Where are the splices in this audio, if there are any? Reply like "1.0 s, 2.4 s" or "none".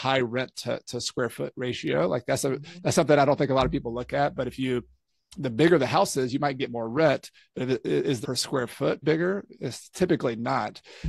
8.2 s, 9.0 s